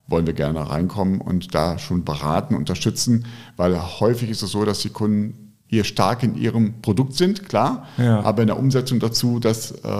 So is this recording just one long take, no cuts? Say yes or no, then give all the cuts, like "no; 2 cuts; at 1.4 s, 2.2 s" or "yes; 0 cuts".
yes; 0 cuts